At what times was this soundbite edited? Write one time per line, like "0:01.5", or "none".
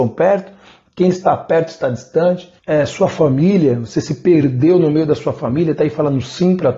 0:02.6